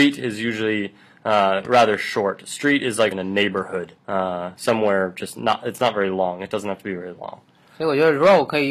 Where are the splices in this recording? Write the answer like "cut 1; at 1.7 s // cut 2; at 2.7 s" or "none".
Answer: cut 1; at 3.1 s // cut 2; at 4.0 s